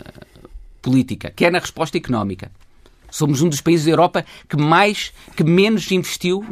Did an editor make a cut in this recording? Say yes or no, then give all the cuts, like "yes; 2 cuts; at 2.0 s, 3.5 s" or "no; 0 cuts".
no; 0 cuts